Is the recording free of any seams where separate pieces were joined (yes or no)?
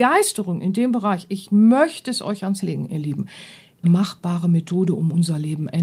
no